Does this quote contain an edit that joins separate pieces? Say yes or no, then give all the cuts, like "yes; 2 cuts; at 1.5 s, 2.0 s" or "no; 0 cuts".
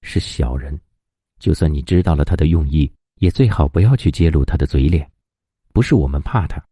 no; 0 cuts